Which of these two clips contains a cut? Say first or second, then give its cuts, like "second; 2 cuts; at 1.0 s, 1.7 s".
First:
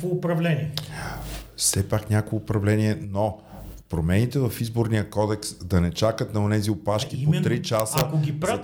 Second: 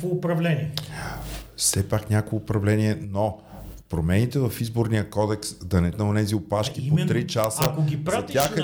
second; 1 cut; at 5.9 s